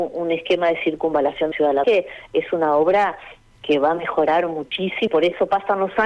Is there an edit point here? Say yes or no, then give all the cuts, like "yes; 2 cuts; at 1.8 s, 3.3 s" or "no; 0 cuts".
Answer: yes; 4 cuts; at 1.5 s, 1.8 s, 3.5 s, 5.1 s